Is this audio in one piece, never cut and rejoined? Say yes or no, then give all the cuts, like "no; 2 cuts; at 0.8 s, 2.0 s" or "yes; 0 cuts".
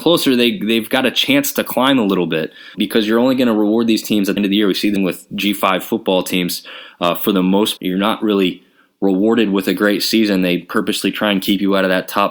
no; 4 cuts; at 2.7 s, 4.4 s, 5.0 s, 7.8 s